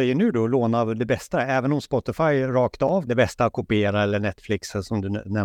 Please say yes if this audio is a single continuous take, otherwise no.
no